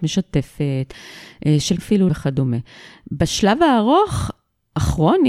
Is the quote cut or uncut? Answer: cut